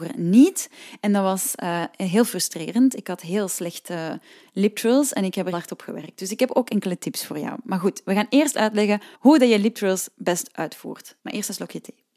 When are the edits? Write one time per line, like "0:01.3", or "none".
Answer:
0:05.5
0:09.1
0:11.2